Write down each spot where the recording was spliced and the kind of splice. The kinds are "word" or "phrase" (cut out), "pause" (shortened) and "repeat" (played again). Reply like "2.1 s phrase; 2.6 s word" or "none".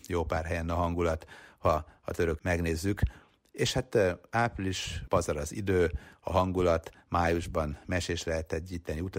2.4 s word; 5.1 s phrase